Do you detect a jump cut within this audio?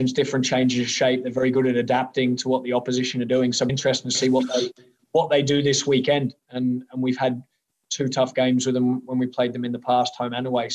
yes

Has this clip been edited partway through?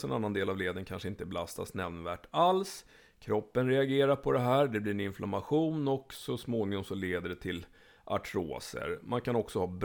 no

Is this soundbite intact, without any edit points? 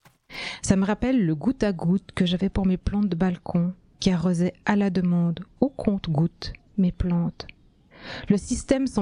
yes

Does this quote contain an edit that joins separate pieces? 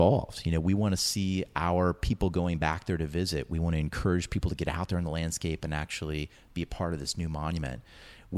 no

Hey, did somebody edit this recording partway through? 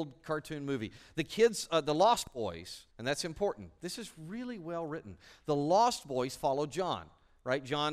yes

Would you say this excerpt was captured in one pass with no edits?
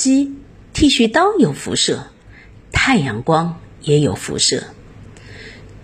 yes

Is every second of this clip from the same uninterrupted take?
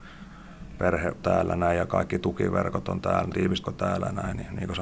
no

